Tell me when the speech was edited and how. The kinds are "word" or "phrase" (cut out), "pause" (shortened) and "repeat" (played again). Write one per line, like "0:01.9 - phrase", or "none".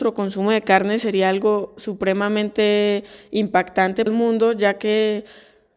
0:04.1 - phrase